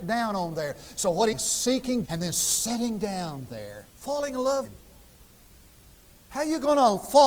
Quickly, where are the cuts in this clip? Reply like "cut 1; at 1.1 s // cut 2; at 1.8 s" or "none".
cut 1; at 1.3 s // cut 2; at 2.1 s // cut 3; at 3.9 s // cut 4; at 4.6 s